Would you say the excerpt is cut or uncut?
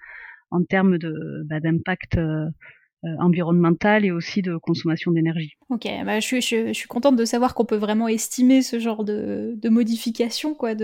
cut